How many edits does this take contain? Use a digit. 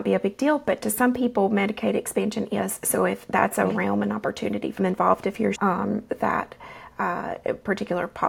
2